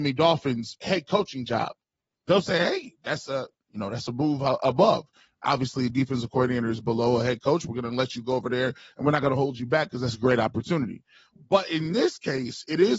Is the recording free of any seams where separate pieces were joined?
yes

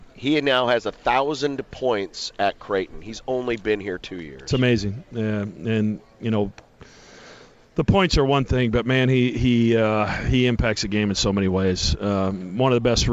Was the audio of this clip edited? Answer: no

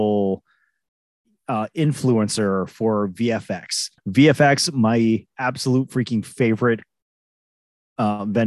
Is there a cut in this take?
yes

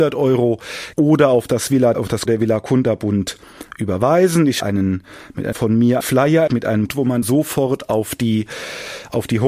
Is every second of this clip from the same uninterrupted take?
no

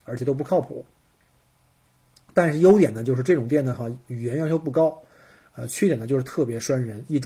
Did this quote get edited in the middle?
no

